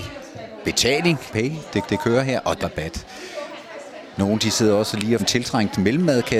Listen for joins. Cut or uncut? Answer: cut